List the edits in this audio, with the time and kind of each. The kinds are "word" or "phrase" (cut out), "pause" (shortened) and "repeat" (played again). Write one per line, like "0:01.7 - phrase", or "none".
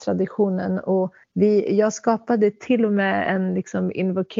0:01.2 - pause

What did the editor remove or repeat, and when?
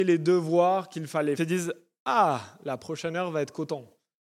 0:01.4 - phrase

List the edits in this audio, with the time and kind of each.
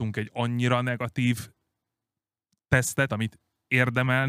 0:03.1 - word

